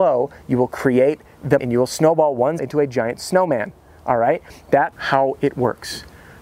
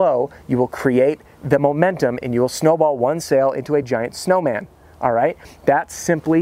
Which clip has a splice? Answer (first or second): first